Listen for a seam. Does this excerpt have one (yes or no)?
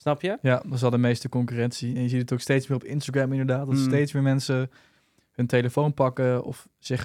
no